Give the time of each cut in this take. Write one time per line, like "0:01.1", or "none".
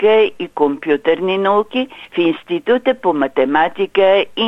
none